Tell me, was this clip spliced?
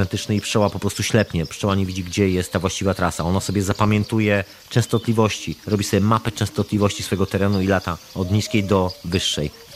no; 0 cuts

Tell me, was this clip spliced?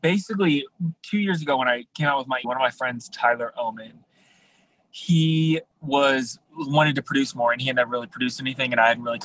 yes; 2 cuts; at 1.0 s, 2.4 s

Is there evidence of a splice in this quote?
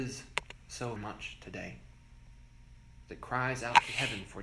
yes; 1 cut; at 1.0 s

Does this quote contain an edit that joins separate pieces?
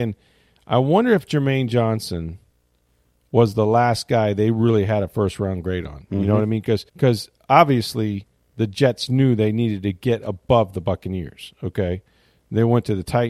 yes; 1 cut; at 6.9 s

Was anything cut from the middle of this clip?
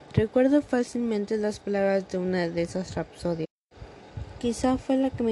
no; 0 cuts

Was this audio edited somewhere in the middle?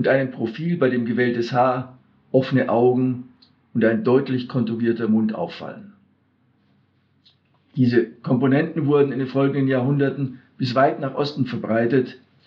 no; 0 cuts

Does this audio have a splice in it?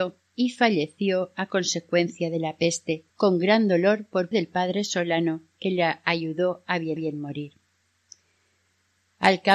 yes; 3 cuts; at 3.1 s, 4.3 s, 7.0 s

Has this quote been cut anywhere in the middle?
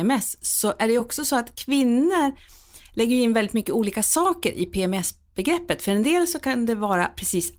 no; 0 cuts

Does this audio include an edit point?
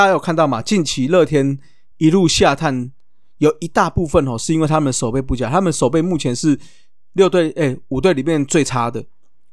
no; 0 cuts

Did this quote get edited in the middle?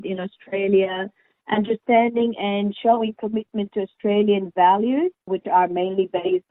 no; 0 cuts

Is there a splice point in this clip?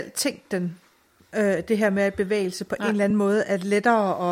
no; 0 cuts

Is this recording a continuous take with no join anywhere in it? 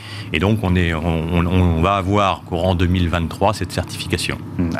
yes; 0 cuts

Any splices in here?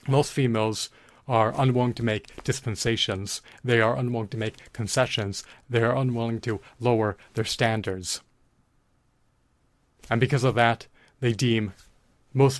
no; 0 cuts

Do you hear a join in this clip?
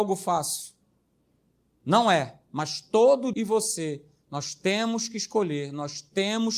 yes; 1 cut; at 3.3 s

